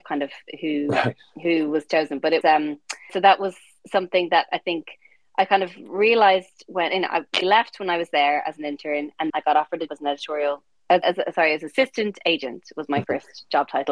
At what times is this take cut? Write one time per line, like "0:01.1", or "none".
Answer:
0:02.4
0:03.1
0:07.4
0:09.3
0:09.9
0:11.0